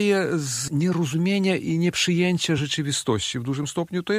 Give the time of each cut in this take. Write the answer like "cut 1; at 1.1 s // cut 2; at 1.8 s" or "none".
none